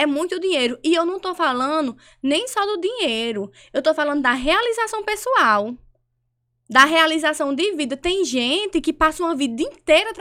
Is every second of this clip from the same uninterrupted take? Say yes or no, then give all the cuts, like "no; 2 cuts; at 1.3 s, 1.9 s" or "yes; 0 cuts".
yes; 0 cuts